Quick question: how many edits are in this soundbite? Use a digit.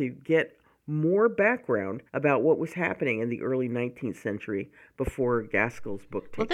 1